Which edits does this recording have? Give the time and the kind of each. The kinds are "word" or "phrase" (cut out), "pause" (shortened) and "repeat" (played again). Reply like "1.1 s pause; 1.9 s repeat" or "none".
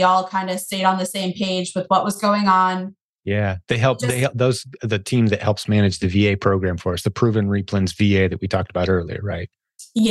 none